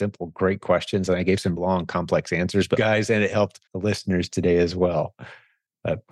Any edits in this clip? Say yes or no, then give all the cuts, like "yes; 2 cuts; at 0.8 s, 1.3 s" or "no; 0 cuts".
yes; 3 cuts; at 1.6 s, 2.8 s, 3.7 s